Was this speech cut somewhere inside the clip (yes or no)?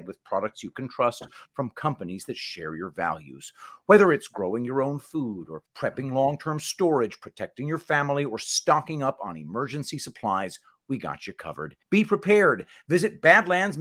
yes